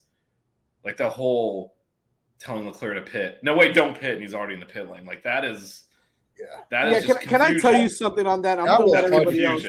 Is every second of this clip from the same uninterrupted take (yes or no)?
yes